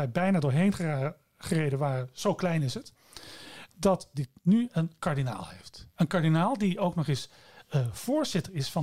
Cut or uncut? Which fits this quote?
cut